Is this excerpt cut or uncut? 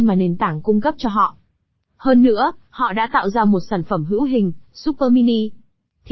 uncut